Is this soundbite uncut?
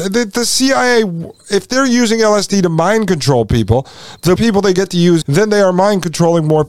no; 2 cuts; at 4.4 s, 5.2 s

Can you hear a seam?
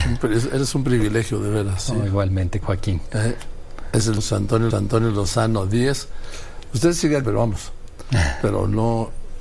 yes; 4 cuts; at 2.6 s, 4.2 s, 4.7 s, 7.2 s

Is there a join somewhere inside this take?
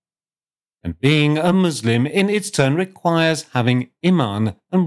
no; 0 cuts

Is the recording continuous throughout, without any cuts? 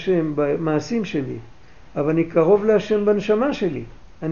yes; 0 cuts

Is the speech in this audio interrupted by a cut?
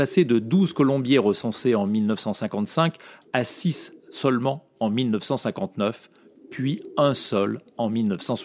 no; 0 cuts

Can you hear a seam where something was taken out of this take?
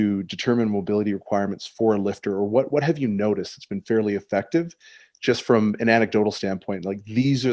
no; 0 cuts

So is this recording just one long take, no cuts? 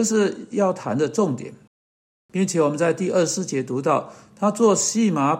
yes; 0 cuts

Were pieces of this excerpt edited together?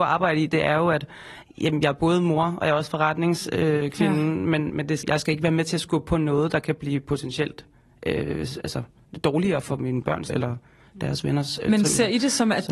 yes; 4 cuts; at 4.7 s, 5.0 s, 9.6 s, 10.3 s

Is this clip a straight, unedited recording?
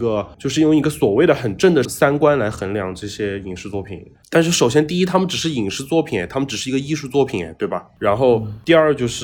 no; 1 cut; at 4.1 s

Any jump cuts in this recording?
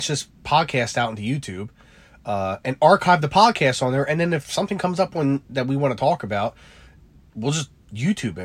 no; 0 cuts

